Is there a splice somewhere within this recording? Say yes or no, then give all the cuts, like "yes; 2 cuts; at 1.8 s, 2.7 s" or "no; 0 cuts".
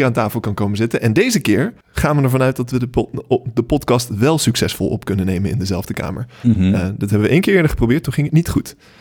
yes; 1 cut; at 1.8 s